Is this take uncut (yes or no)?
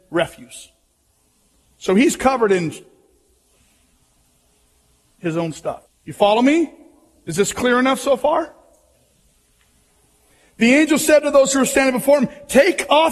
no